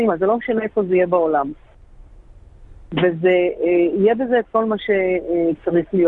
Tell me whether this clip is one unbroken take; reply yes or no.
yes